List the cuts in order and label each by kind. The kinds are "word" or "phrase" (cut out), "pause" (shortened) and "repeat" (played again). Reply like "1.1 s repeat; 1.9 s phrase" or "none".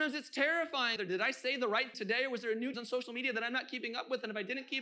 1.0 s word; 1.9 s word; 2.7 s word